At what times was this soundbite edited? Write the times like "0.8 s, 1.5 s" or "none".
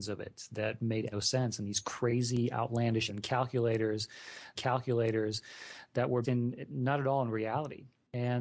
1.1 s, 3.1 s, 4.6 s, 6.2 s